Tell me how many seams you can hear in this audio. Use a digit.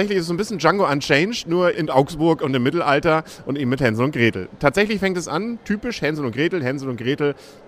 1